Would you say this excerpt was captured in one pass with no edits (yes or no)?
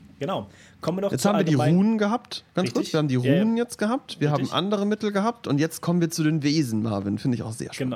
yes